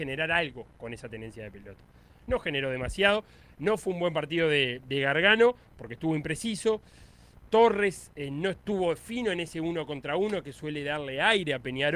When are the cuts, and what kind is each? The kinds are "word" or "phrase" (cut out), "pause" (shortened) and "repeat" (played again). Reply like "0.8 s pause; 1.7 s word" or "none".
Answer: none